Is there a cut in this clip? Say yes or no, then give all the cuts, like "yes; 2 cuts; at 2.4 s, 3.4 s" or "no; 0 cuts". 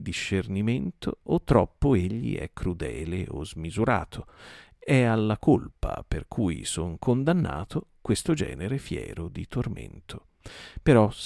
no; 0 cuts